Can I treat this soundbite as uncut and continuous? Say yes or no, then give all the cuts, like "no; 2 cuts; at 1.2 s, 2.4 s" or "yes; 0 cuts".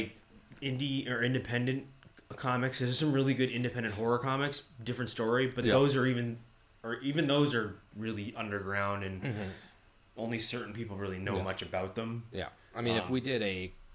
yes; 0 cuts